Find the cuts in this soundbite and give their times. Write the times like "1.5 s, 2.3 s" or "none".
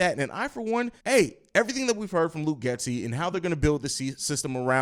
1.0 s